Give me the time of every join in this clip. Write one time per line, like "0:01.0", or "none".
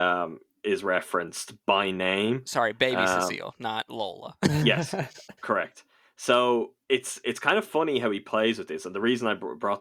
0:05.4
0:06.8